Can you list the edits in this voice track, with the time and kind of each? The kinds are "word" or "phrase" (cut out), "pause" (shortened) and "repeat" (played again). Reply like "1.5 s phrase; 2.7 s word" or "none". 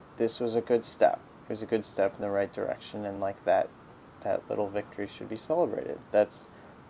none